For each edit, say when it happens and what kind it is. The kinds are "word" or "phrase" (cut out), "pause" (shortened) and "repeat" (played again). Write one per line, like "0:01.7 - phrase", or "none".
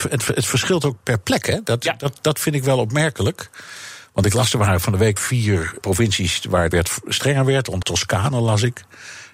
0:01.0 - word
0:05.2 - word
0:05.8 - word
0:06.7 - word
0:07.8 - word